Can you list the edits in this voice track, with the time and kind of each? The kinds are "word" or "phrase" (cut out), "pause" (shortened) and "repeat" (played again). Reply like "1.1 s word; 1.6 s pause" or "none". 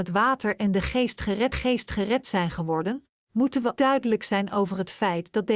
1.5 s repeat; 3.8 s word